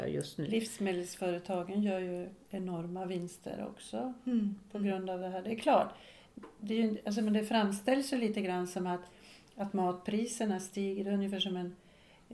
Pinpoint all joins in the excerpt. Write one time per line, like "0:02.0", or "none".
none